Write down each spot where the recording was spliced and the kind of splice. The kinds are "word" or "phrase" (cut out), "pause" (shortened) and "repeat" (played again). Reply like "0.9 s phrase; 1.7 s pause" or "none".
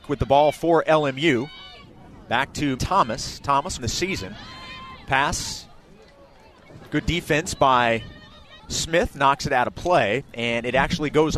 2.8 s word; 3.8 s phrase; 8.6 s pause